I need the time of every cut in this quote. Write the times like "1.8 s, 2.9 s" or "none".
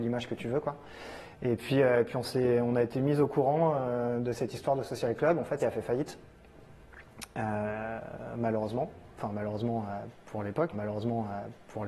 5.6 s, 10.7 s

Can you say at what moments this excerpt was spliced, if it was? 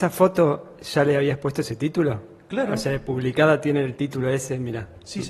none

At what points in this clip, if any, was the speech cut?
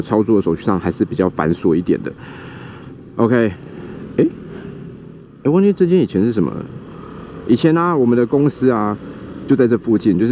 5.2 s

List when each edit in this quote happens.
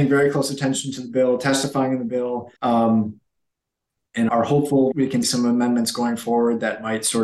2.6 s, 4.3 s, 4.9 s, 5.2 s

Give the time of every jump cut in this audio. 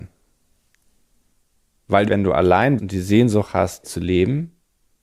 2.1 s, 2.8 s, 3.8 s

